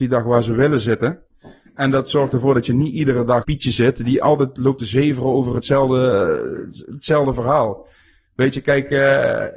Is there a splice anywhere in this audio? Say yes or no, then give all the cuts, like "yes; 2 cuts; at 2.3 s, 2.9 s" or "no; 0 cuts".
yes; 1 cut; at 3.4 s